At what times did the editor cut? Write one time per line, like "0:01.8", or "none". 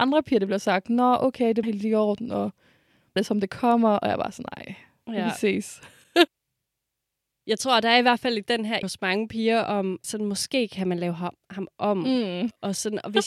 0:01.6
0:03.2
0:08.8
0:10.0